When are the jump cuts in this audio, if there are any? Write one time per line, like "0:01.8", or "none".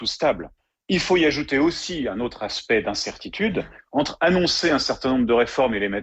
none